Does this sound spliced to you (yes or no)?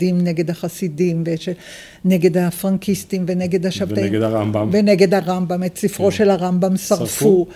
no